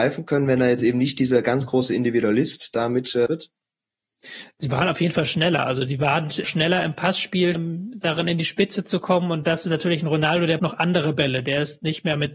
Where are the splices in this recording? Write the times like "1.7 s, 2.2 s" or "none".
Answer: 3.3 s, 6.4 s, 7.5 s, 10.6 s